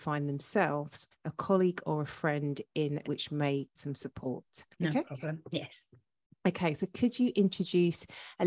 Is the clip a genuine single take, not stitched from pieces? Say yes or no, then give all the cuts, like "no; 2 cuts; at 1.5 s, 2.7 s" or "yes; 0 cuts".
no; 4 cuts; at 1.1 s, 3.0 s, 3.8 s, 4.7 s